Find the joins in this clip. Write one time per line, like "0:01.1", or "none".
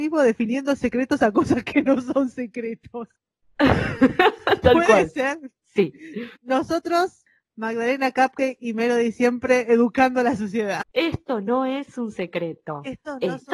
0:03.1
0:06.4
0:10.9